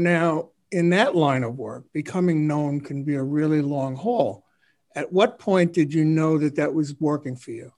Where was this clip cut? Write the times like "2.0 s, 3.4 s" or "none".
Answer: none